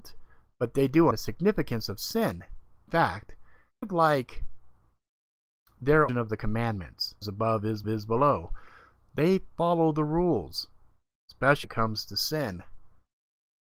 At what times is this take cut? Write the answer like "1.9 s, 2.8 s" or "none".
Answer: 1.1 s, 2.8 s, 3.8 s, 6.1 s, 7.2 s, 7.8 s, 11.6 s